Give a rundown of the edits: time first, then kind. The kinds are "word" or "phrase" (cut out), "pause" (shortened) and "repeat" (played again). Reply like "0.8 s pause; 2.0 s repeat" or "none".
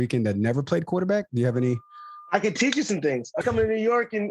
3.4 s word

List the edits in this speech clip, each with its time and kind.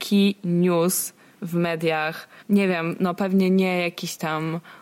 2.4 s pause

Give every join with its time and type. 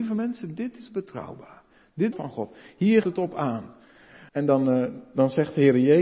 2.1 s phrase; 3.0 s word; 4.3 s pause

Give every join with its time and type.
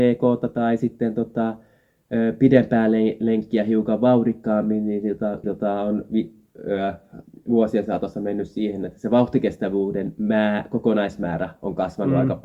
5.4 s word

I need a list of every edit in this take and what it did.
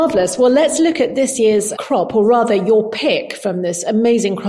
1.7 s word

